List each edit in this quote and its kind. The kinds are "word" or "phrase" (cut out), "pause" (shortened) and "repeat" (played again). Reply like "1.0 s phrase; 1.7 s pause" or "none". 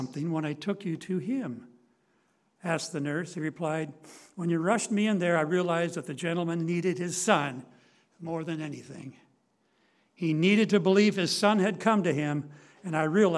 none